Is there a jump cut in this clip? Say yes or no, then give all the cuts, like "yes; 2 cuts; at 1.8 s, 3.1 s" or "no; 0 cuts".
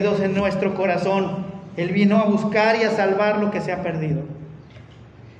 no; 0 cuts